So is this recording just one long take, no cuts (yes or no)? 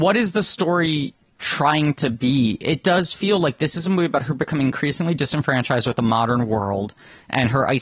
yes